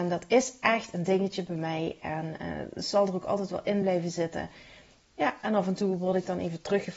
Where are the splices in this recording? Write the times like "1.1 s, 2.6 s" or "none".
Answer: none